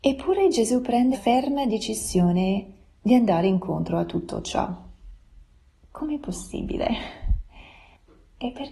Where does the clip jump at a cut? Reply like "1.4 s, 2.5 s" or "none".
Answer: 1.1 s